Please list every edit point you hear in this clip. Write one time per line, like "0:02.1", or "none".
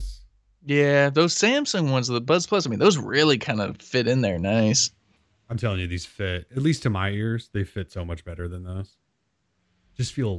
0:05.2